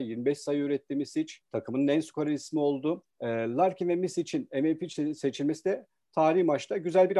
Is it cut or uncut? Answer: cut